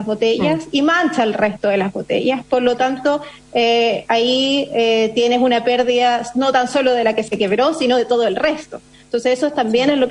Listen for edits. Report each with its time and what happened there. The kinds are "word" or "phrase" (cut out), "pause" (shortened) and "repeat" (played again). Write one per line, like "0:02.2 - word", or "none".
none